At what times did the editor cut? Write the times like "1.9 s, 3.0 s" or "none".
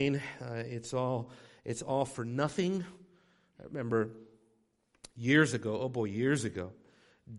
none